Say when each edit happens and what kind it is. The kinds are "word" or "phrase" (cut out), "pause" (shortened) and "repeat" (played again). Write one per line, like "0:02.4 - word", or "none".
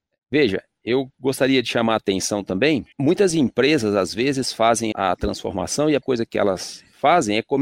0:02.9 - word
0:04.9 - word
0:06.0 - word